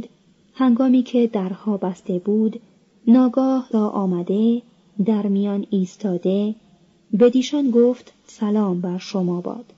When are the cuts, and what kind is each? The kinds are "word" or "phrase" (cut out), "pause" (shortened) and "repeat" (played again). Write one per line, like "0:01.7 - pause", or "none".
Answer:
0:03.7 - word